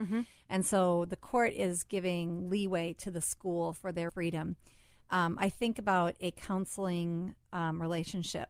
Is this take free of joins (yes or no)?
no